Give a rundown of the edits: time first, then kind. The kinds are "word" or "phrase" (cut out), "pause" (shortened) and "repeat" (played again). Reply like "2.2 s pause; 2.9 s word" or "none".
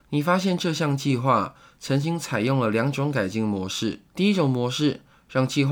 4.1 s pause

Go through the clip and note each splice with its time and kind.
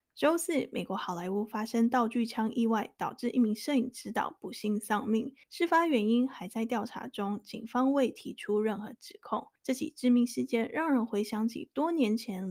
5.4 s pause; 9.6 s pause

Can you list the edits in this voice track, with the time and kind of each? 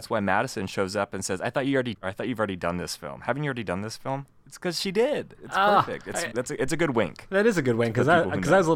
1.9 s phrase; 6.3 s word

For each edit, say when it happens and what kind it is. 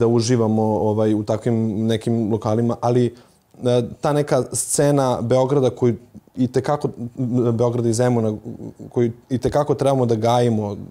none

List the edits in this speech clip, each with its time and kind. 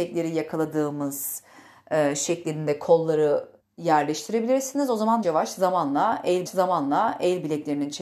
3.6 s pause; 5.2 s phrase; 6.5 s repeat

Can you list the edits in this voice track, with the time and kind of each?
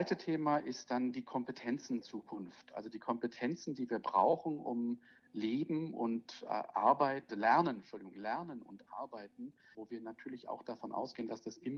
2.0 s word; 7.3 s word; 9.7 s word

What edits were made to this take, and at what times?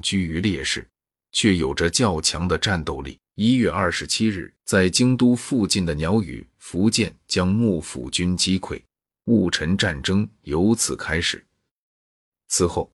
3.3 s pause; 4.6 s pause

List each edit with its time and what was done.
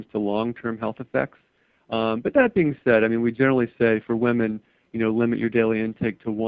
none

